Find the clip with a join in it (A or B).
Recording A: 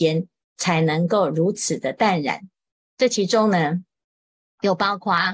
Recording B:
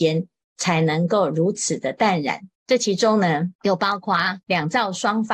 B